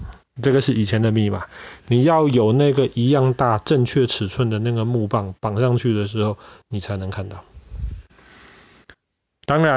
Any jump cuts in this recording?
no; 0 cuts

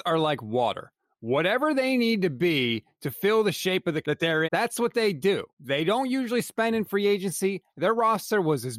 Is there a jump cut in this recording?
yes; 3 cuts; at 4.0 s, 4.4 s, 5.5 s

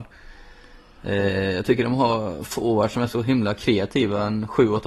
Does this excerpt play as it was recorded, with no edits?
yes; 0 cuts

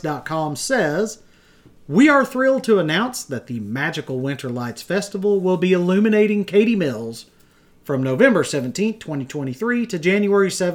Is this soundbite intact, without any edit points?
yes; 0 cuts

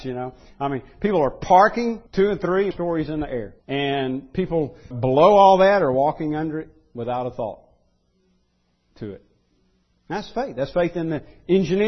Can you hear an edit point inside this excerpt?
yes; 4 cuts; at 2.1 s, 2.7 s, 3.6 s, 4.9 s

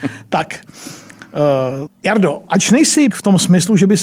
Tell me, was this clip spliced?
yes; 2 cuts; at 1.9 s, 3.1 s

